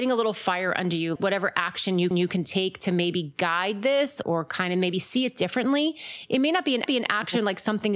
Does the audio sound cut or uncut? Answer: cut